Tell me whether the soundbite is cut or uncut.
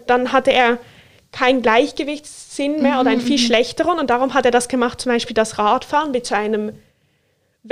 uncut